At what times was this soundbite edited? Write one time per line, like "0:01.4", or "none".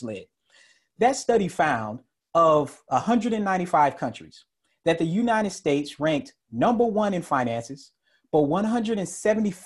none